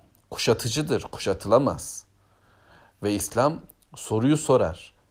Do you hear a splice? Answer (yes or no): no